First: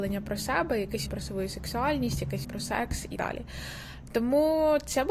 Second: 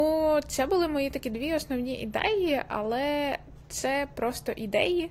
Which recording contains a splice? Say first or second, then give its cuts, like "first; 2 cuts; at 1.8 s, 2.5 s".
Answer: first; 3 cuts; at 1.1 s, 2.4 s, 3.2 s